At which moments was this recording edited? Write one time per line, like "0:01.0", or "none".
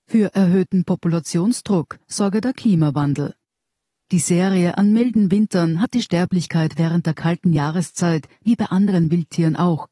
none